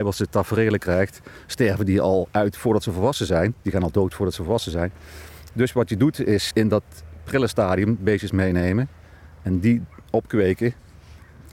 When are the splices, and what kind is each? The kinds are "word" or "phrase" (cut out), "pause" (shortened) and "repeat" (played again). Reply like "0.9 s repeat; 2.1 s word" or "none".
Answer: 3.6 s pause; 6.5 s word